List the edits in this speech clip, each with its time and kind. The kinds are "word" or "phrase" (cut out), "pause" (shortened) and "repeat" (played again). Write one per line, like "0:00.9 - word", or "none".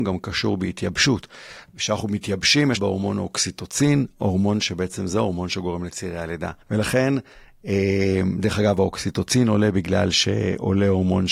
0:02.8 - phrase
0:06.6 - pause

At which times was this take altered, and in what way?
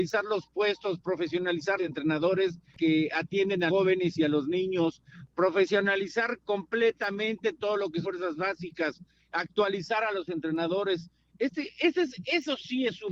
0:01.8 - word
0:03.7 - word
0:08.0 - word

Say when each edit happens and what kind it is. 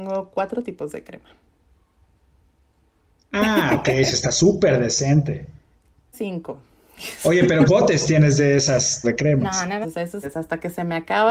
0:06.1 - word
0:07.7 - word
0:09.0 - word
0:09.8 - word
0:10.2 - word

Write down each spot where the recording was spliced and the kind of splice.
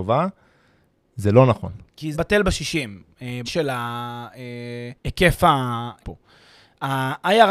0:02.1 - word
0:03.5 - word
0:05.0 - pause
0:06.0 - phrase

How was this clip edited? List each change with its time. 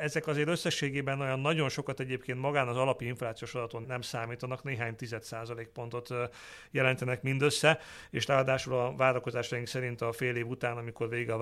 0:03.8 - word

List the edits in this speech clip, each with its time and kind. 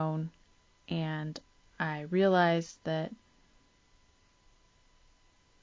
none

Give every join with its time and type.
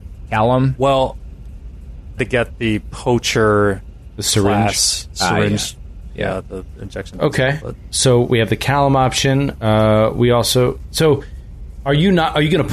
0:02.2 - phrase
0:07.9 - word

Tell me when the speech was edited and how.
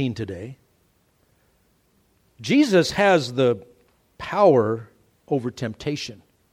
none

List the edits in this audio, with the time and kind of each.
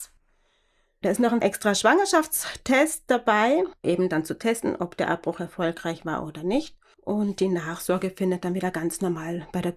0:03.8 - word

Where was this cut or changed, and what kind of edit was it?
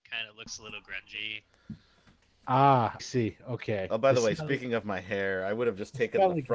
0:03.0 - word

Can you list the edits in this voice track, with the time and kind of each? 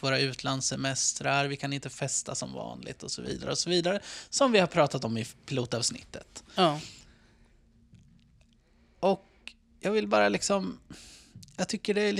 none

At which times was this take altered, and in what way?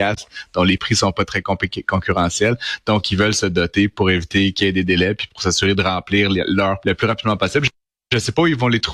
0:06.8 - word

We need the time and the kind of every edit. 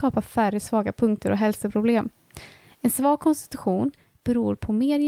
none

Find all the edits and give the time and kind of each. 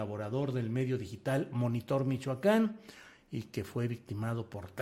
none

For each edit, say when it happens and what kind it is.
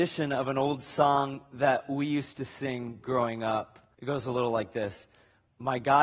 0:03.9 - pause

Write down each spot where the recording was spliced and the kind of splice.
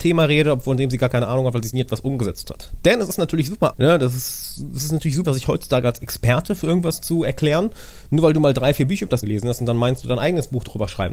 0:03.7 - word
0:05.2 - word
0:09.2 - word

